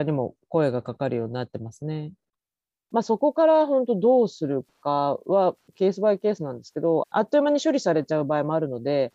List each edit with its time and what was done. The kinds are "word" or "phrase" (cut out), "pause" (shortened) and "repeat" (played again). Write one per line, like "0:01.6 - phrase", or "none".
none

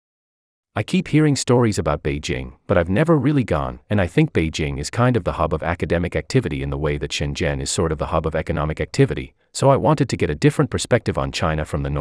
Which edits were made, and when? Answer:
0:03.8 - pause

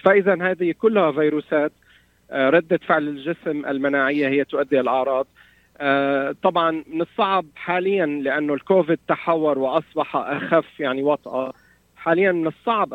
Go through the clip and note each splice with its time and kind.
none

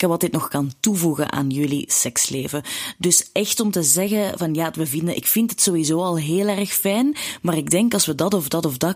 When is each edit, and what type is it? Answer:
none

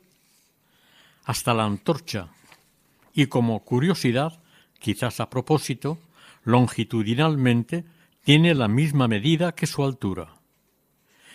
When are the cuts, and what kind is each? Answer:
none

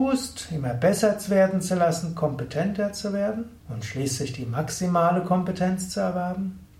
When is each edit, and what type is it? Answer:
0:03.6 - pause

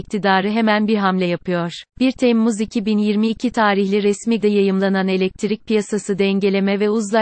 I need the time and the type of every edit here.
0:01.9 - pause
0:04.4 - word

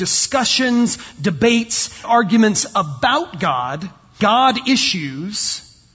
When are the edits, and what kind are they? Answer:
0:02.0 - word
0:04.2 - word

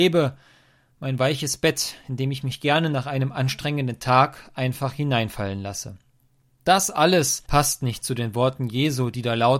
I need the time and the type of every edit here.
none

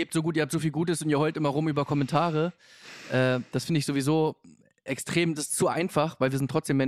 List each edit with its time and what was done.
none

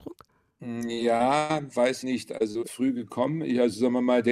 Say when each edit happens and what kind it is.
0:02.0 - word
0:02.6 - phrase

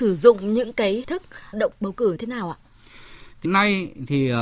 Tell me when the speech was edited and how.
0:01.0 - word
0:01.5 - phrase
0:02.2 - word
0:03.4 - word

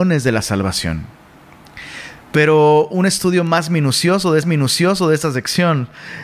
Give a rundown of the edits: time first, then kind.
0:02.2 - pause
0:04.4 - repeat

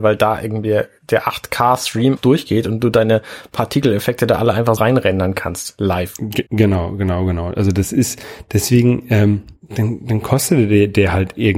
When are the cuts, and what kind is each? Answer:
0:02.2 - word
0:04.8 - word
0:06.5 - pause
0:09.6 - pause

